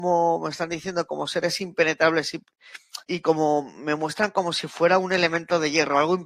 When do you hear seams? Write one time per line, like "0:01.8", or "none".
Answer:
0:03.0